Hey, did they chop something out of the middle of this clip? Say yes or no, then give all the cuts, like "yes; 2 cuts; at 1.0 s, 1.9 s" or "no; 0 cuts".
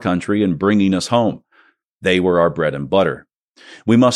no; 0 cuts